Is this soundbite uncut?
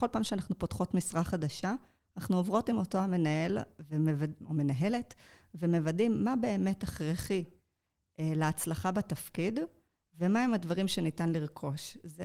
yes; 0 cuts

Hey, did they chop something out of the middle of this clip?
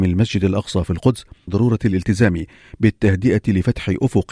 yes; 1 cut; at 1.5 s

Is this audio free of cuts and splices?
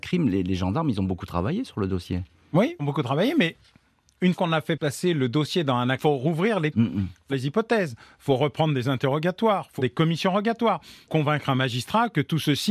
no; 7 cuts; at 2.8 s, 4.3 s, 6.0 s, 6.7 s, 7.3 s, 9.8 s, 11.1 s

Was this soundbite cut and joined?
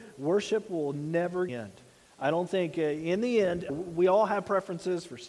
yes; 2 cuts; at 1.5 s, 3.7 s

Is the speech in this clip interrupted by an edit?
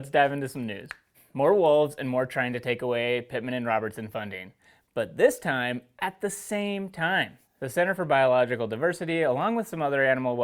no; 0 cuts

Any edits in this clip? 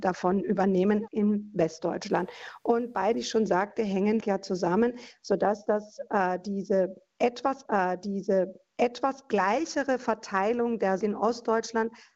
yes; 5 cuts; at 1.1 s, 3.1 s, 4.2 s, 7.6 s, 11.0 s

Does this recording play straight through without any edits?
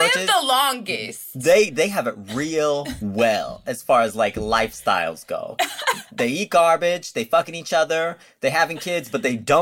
yes; 0 cuts

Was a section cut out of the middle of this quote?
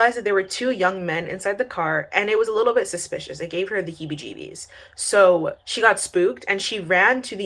no; 0 cuts

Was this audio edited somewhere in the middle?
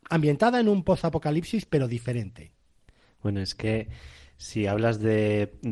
no; 0 cuts

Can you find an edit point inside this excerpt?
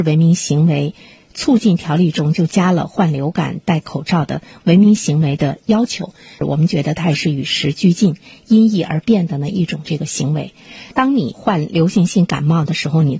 no; 0 cuts

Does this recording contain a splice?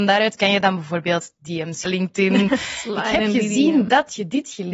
yes; 1 cut; at 1.9 s

